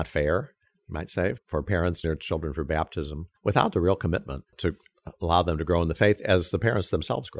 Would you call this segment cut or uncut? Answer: cut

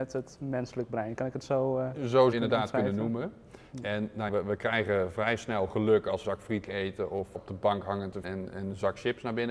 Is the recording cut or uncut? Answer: cut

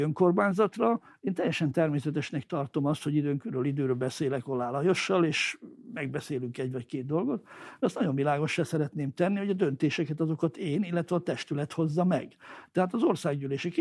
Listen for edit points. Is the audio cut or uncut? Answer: uncut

